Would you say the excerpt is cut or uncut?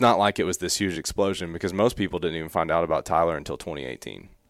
uncut